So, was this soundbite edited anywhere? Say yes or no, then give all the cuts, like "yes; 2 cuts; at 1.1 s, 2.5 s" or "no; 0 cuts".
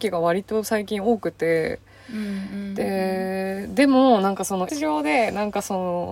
yes; 1 cut; at 4.7 s